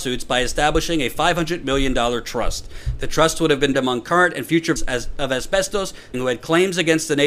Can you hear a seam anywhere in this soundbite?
yes; 3 cuts; at 3.7 s, 4.8 s, 6.1 s

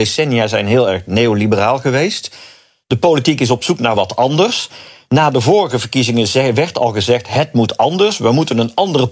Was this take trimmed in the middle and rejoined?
no; 0 cuts

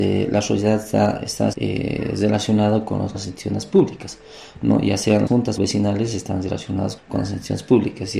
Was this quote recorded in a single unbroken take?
no; 5 cuts; at 1.5 s, 3.1 s, 5.3 s, 5.6 s, 7.0 s

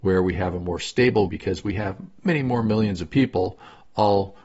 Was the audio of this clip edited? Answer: yes; 1 cut; at 1.3 s

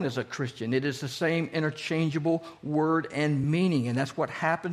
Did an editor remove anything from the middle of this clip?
no; 0 cuts

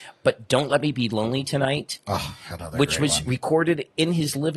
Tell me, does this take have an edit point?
no; 0 cuts

